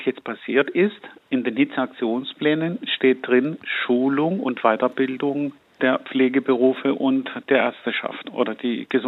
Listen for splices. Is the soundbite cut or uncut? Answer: uncut